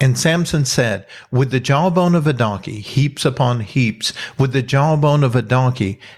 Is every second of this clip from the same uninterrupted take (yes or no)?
yes